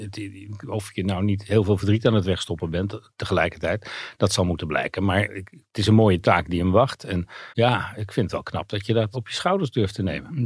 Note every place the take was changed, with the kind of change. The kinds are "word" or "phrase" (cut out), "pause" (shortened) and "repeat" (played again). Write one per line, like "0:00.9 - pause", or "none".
0:05.3 - word
0:07.5 - pause
0:09.1 - word